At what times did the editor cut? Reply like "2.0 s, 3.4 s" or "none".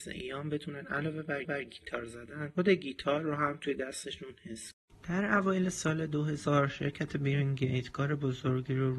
1.4 s, 4.9 s